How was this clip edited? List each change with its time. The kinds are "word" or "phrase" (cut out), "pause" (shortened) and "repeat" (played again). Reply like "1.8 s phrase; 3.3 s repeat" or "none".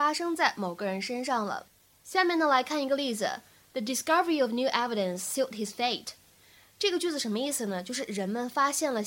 none